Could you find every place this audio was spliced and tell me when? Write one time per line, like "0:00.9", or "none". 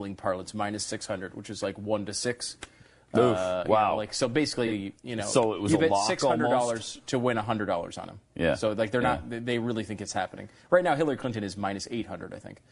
0:05.0